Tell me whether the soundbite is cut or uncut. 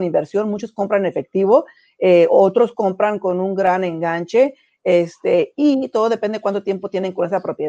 uncut